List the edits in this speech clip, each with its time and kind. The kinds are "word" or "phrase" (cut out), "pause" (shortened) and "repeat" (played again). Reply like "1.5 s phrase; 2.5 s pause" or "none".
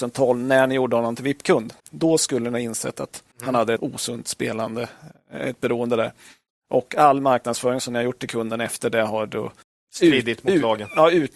1.8 s pause; 3.3 s pause; 3.8 s word; 9.6 s pause